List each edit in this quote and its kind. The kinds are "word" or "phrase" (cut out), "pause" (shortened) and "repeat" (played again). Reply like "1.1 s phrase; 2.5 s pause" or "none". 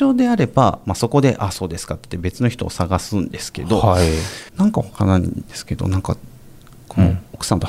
4.5 s pause